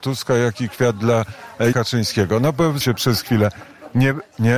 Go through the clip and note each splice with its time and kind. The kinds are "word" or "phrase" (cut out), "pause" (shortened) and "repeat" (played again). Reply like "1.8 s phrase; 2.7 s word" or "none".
1.7 s word; 2.8 s word